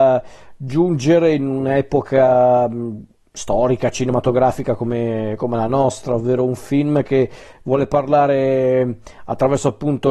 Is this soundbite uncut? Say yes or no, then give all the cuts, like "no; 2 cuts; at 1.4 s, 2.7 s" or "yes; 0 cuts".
yes; 0 cuts